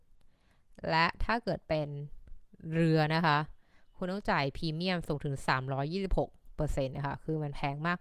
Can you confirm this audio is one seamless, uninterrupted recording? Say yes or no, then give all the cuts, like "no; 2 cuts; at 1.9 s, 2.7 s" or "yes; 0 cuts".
yes; 0 cuts